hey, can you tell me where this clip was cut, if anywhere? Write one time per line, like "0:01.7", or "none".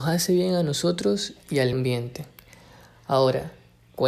0:01.7